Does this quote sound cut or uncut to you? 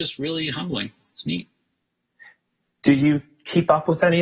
uncut